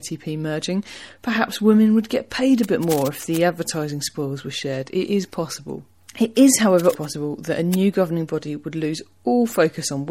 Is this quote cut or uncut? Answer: cut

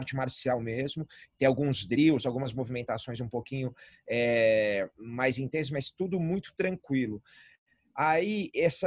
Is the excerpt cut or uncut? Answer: uncut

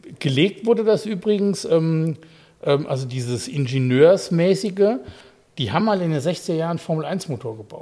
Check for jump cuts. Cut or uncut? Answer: uncut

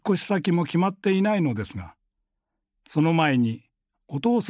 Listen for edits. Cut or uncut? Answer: uncut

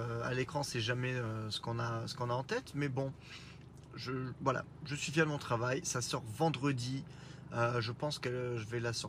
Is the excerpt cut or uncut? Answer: uncut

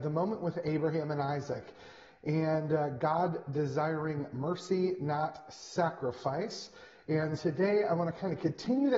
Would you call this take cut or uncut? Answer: cut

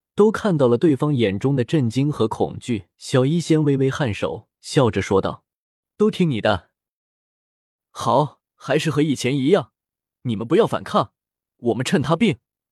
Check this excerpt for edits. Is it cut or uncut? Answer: cut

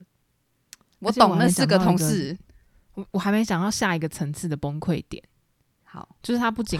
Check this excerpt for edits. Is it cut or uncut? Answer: cut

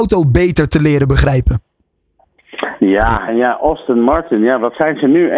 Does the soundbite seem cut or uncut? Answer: cut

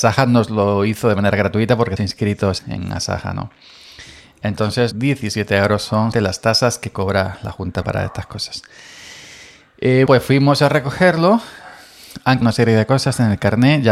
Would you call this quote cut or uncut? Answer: cut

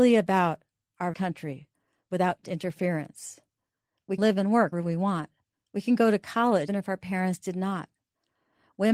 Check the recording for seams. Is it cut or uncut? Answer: cut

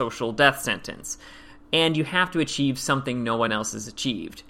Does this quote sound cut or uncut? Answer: uncut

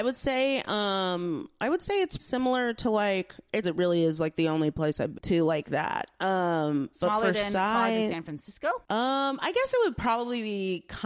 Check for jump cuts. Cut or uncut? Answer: cut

